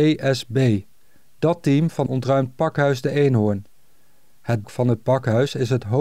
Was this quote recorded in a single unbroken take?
no; 2 cuts; at 2.1 s, 4.6 s

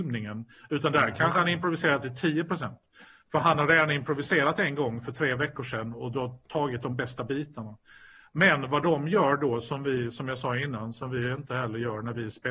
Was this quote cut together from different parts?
no; 0 cuts

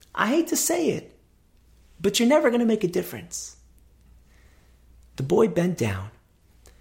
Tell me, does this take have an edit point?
no; 0 cuts

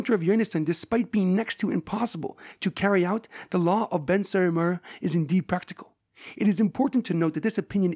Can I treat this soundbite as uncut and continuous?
yes; 0 cuts

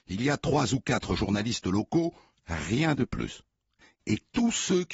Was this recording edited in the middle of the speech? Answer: no; 0 cuts

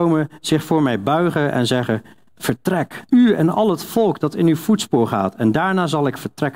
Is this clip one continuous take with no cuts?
no; 1 cut; at 3.1 s

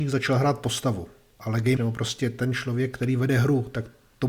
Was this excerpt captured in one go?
no; 1 cut; at 1.8 s

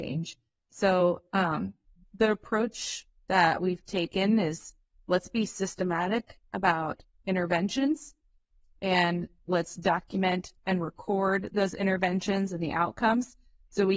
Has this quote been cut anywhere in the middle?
no; 0 cuts

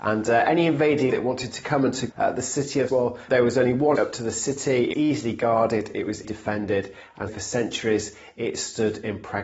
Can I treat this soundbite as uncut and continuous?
no; 8 cuts; at 1.1 s, 2.1 s, 2.9 s, 3.3 s, 4.0 s, 4.9 s, 6.2 s, 7.3 s

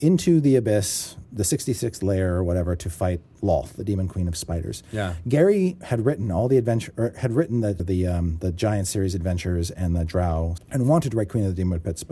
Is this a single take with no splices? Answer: no; 3 cuts; at 1.2 s, 7.8 s, 10.6 s

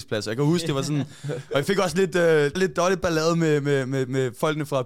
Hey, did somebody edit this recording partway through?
yes; 1 cut; at 2.6 s

